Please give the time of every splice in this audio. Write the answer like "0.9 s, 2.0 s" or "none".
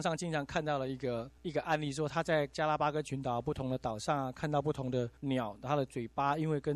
1.4 s, 5.2 s